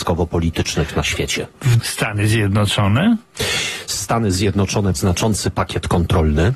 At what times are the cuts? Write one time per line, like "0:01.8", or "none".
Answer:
0:01.8
0:05.0